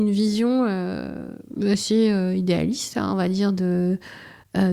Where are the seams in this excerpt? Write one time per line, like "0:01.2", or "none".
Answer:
none

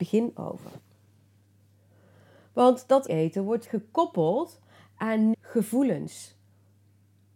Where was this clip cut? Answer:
0:03.1
0:03.6
0:05.3

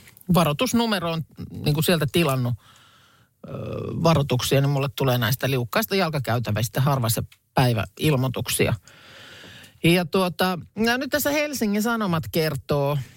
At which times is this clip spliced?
none

